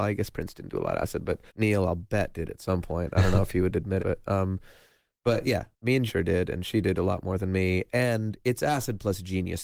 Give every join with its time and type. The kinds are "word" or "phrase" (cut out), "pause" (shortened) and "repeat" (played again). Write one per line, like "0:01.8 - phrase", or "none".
0:01.5 - pause
0:04.0 - word
0:05.7 - pause
0:06.1 - word

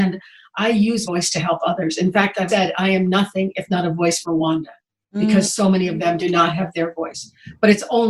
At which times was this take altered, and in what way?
0:01.0 - word
0:02.5 - word
0:04.2 - phrase

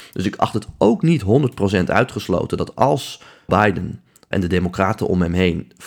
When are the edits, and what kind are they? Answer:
0:03.5 - word
0:04.3 - word

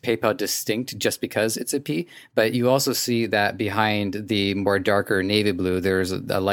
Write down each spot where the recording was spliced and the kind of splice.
none

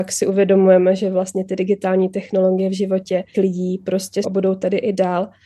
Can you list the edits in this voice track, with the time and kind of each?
0:03.3 - word
0:04.2 - word

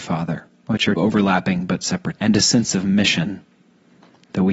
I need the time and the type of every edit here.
0:01.0 - word
0:02.2 - word

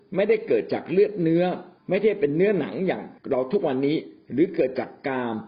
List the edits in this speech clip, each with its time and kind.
0:01.8 - pause
0:03.2 - pause

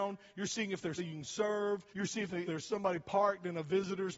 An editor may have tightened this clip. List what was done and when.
0:01.0 - word
0:01.9 - pause
0:02.4 - word

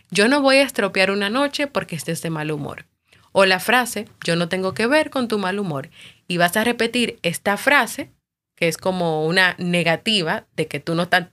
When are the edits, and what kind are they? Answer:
none

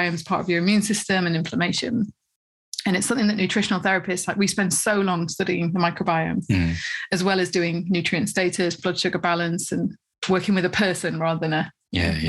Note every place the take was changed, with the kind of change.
none

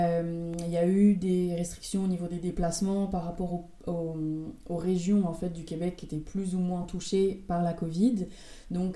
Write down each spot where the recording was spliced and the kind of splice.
none

